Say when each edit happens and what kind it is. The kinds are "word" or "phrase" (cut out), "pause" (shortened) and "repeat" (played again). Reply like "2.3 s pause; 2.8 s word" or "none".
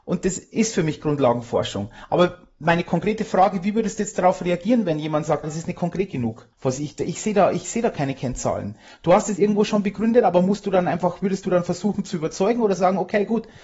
5.4 s word; 6.5 s pause; 9.4 s word

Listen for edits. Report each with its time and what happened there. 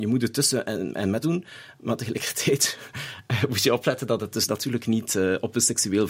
1.2 s word

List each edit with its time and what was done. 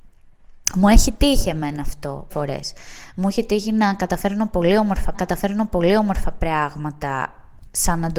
2.3 s word; 5.1 s repeat

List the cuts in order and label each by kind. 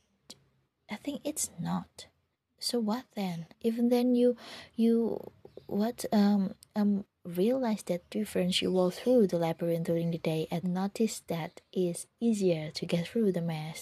2.3 s pause; 3.5 s pause; 10.6 s phrase

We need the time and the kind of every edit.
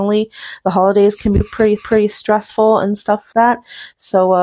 1.8 s repeat; 3.3 s word

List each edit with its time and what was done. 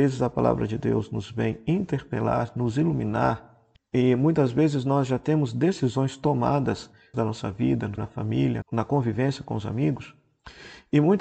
3.8 s pause; 7.1 s phrase; 8.0 s word; 8.6 s word

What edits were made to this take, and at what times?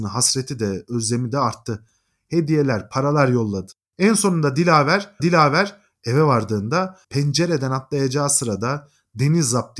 3.8 s pause; 5.2 s repeat; 7.0 s pause

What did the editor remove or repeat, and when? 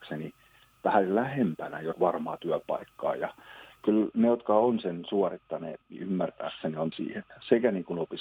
1.9 s word; 3.8 s word; 5.8 s phrase; 6.9 s word

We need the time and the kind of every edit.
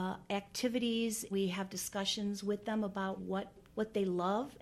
1.3 s word; 3.2 s word; 3.7 s pause

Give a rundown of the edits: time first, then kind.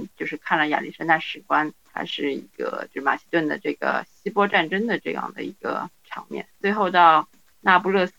6.5 s pause

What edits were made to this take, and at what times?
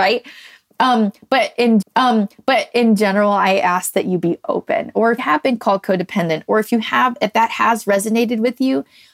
1.8 s repeat; 5.2 s word

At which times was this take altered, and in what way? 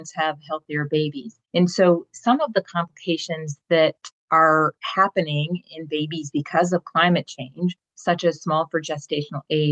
1.5 s pause; 4.2 s pause

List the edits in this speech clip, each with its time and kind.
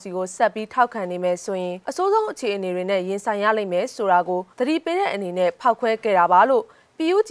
1.8 s pause; 4.5 s pause

